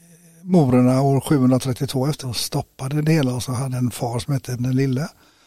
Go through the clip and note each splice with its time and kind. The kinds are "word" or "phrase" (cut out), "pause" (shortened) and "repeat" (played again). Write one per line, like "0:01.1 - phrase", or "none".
0:02.2 - word
0:03.4 - word
0:03.7 - word
0:04.6 - word